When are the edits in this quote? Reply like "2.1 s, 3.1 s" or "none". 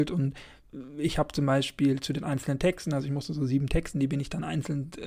3.9 s